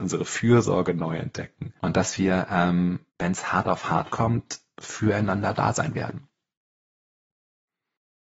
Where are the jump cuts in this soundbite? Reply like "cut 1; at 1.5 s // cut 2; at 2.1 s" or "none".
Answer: cut 1; at 1.8 s // cut 2; at 3.1 s